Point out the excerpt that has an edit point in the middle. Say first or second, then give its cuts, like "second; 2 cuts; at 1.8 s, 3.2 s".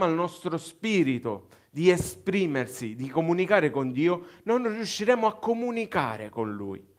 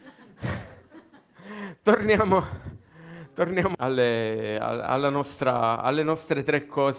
second; 1 cut; at 3.7 s